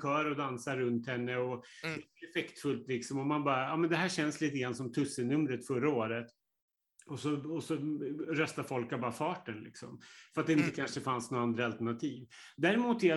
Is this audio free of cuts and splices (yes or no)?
yes